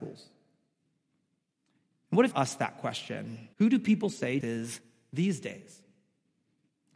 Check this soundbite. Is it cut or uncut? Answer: cut